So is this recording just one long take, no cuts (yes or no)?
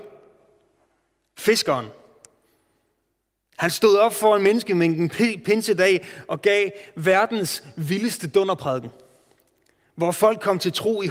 yes